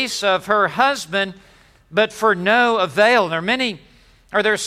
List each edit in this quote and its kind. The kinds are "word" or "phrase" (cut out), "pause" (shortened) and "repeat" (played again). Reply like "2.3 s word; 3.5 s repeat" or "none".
none

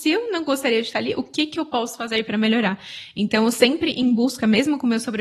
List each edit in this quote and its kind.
none

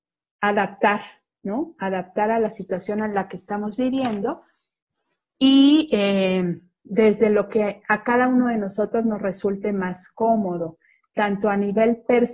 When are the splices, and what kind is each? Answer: none

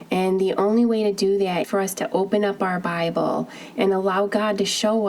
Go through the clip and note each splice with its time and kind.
1.6 s word

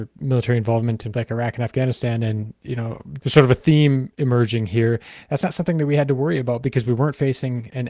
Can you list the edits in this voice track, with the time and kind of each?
1.1 s word; 3.2 s word

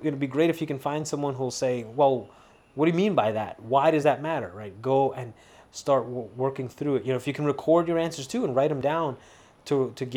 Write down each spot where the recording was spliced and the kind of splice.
none

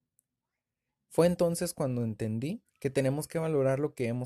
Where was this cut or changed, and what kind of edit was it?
2.6 s pause

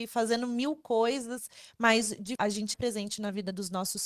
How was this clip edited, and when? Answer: 2.4 s word; 2.7 s word

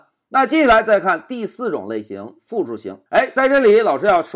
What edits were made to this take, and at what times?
3.1 s pause

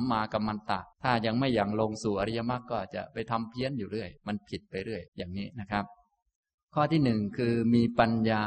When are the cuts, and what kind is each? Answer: 0.9 s pause; 4.2 s pause; 5.1 s pause; 6.4 s pause

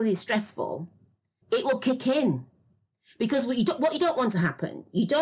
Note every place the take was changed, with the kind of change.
1.4 s word

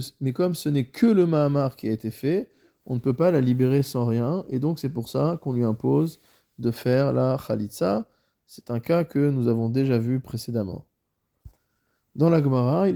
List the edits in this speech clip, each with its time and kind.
none

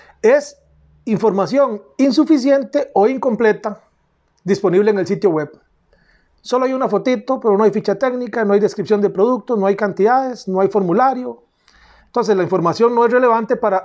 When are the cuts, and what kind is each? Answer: none

